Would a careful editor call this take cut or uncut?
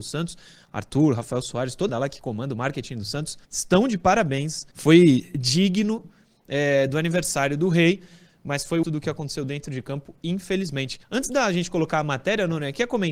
cut